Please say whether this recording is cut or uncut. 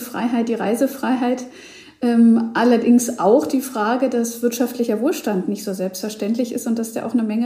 uncut